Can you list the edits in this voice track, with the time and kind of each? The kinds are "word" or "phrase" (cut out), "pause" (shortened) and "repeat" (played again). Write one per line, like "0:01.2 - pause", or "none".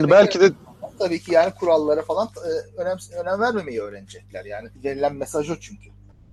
0:04.8 - pause